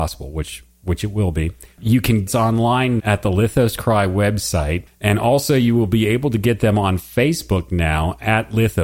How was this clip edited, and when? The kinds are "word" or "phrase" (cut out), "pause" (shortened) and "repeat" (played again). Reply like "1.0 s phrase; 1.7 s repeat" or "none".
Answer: 1.7 s pause; 2.3 s phrase; 3.0 s word